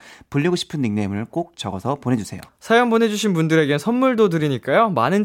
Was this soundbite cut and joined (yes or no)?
yes